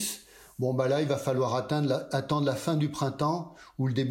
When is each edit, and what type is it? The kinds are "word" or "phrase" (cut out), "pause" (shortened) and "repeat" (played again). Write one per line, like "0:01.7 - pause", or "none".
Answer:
none